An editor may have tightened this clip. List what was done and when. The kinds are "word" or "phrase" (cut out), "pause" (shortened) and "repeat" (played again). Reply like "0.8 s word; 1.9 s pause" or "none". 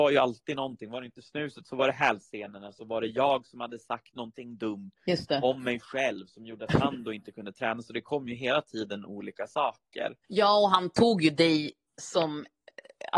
5.0 s pause; 10.2 s pause